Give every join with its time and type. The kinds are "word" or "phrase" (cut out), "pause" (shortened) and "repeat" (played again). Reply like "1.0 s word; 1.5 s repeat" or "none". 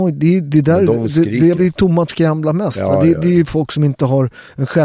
1.5 s word; 2.1 s phrase